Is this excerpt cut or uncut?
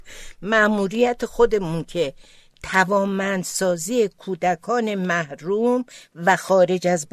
uncut